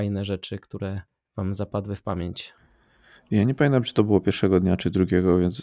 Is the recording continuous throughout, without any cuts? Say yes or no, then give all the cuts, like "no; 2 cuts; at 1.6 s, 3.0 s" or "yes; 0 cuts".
yes; 0 cuts